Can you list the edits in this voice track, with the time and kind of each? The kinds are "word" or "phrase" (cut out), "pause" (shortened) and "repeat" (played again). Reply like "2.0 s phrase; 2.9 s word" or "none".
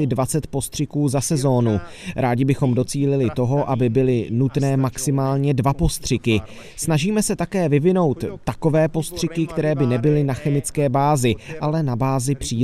none